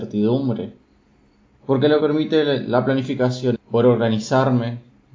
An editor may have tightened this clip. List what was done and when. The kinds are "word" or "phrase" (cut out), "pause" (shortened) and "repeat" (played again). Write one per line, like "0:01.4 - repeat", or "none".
0:02.0 - word
0:03.5 - word

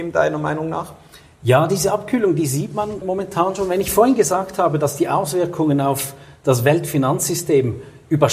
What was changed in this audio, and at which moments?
0:03.0 - word

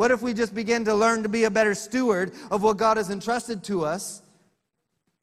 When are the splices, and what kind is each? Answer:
none

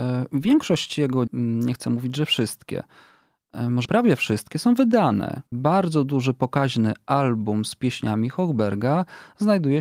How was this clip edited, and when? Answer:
0:01.3 - word
0:03.9 - word
0:05.5 - pause

